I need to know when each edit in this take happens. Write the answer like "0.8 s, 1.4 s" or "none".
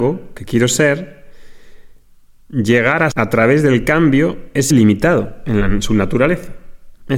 3.1 s, 4.7 s